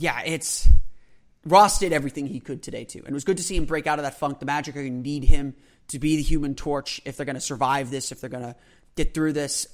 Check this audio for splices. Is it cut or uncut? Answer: uncut